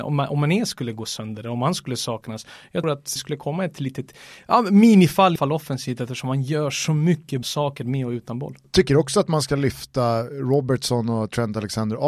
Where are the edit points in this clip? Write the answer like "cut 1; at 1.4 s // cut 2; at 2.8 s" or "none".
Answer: cut 1; at 2.8 s // cut 2; at 3.2 s // cut 3; at 5.4 s // cut 4; at 7.4 s